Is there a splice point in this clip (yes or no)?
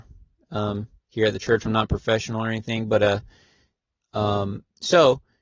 yes